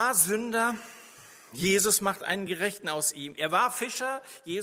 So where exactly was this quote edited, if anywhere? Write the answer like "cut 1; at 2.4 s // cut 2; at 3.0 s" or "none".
none